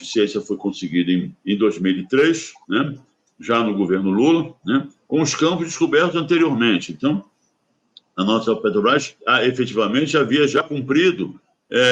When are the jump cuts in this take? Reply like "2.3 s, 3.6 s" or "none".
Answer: 1.4 s, 2.6 s, 9.2 s